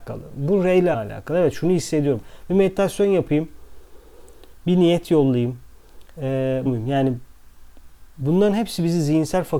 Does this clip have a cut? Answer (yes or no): yes